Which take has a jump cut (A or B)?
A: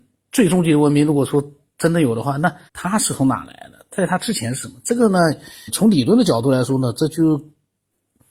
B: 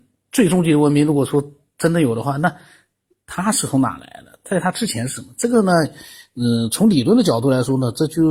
A